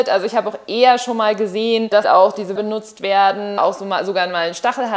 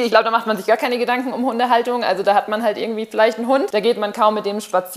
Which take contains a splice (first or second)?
first